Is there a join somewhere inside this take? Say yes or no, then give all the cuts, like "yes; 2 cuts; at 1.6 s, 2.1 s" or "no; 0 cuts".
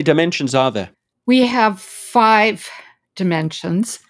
no; 0 cuts